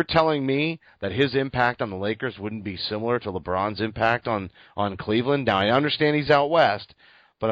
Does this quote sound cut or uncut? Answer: uncut